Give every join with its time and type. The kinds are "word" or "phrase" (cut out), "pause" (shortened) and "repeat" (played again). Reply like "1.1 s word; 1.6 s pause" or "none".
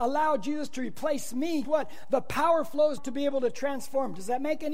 1.6 s word; 3.0 s word

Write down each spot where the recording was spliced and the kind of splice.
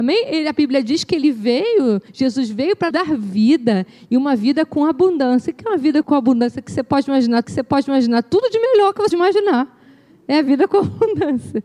2.1 s pause; 2.9 s word; 6.0 s word; 7.4 s repeat; 9.1 s word

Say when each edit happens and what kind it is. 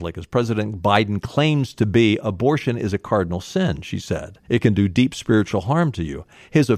4.4 s pause

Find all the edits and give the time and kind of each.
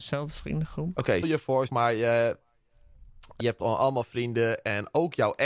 1.2 s word; 1.7 s word; 3.4 s word

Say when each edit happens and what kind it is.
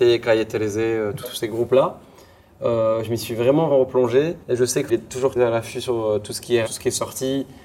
1.2 s word; 3.7 s word; 4.4 s pause; 4.9 s phrase; 5.4 s word; 6.7 s word

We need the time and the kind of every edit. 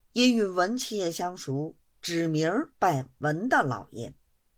2.7 s pause

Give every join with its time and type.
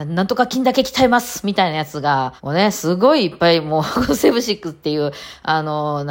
2.4 s pause

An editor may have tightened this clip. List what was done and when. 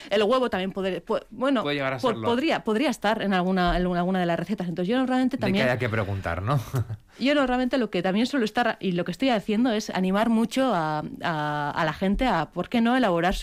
none

